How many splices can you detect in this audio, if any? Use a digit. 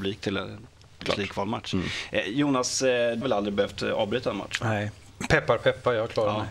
2